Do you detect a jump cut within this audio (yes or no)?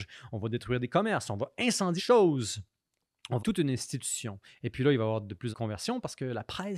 yes